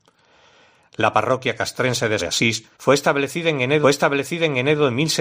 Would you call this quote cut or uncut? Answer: cut